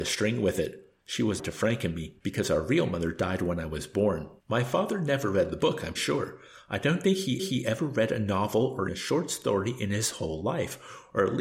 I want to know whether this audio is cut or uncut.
cut